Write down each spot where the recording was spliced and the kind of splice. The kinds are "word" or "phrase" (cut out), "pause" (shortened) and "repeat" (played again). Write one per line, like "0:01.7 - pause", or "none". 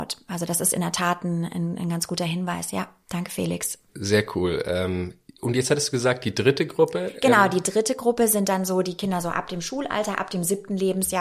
0:03.9 - pause